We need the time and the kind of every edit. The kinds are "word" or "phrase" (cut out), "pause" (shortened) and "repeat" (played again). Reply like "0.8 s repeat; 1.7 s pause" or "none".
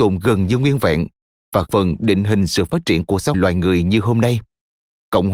1.7 s word; 3.3 s word